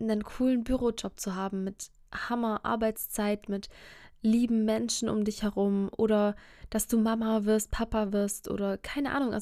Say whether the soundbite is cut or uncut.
uncut